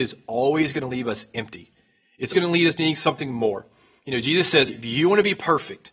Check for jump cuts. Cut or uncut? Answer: cut